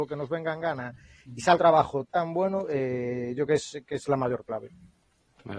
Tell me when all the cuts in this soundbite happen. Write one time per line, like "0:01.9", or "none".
0:01.6
0:02.1
0:03.5

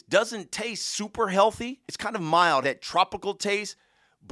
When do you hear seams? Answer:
0:01.8
0:02.6

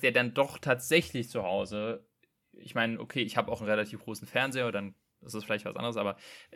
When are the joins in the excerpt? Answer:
none

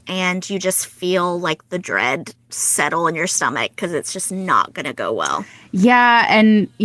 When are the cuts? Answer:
none

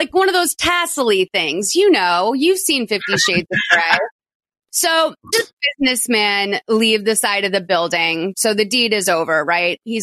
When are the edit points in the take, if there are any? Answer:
0:05.3

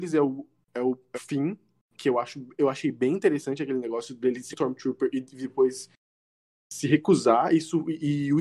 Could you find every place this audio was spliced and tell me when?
0:01.1
0:04.5

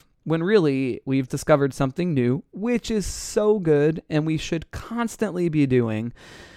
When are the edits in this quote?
0:01.3

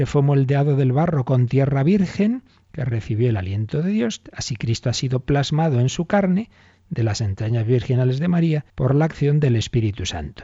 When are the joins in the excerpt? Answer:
0:08.7

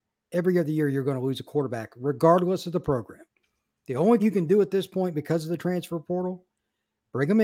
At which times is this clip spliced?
0:04.2

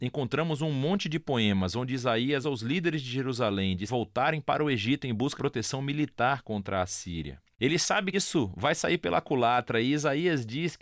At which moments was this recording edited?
0:02.4
0:03.9
0:05.4
0:08.1

